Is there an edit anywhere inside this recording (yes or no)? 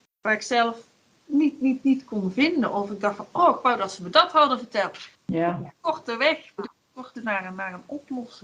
yes